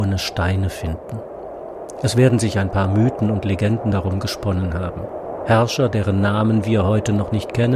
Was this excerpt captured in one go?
yes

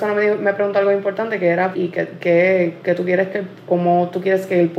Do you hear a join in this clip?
yes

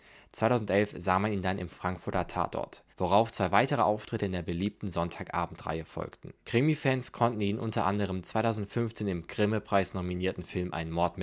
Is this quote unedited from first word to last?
no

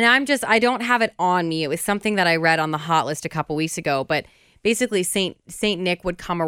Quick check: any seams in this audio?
no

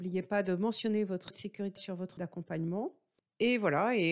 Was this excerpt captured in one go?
no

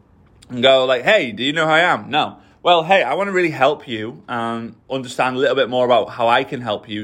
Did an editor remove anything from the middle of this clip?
yes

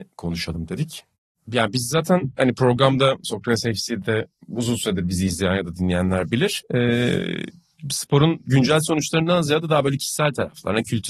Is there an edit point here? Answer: no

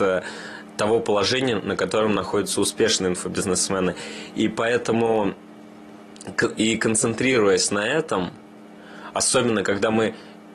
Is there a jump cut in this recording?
no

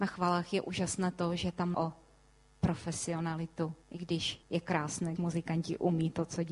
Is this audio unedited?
no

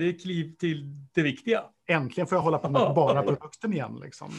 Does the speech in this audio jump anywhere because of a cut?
no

